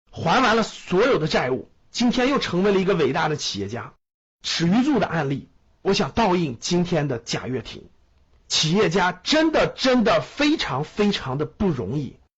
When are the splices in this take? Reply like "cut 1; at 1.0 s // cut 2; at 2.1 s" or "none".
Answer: cut 1; at 5.6 s